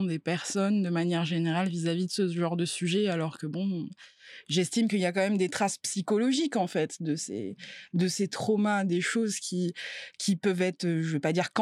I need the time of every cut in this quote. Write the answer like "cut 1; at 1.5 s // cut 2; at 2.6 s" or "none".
none